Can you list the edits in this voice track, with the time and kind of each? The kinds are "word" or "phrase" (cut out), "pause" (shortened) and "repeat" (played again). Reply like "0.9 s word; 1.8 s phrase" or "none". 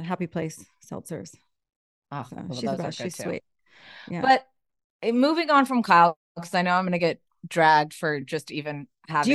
none